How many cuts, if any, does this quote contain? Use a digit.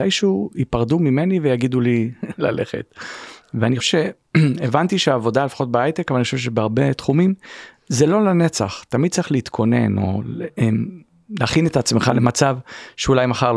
1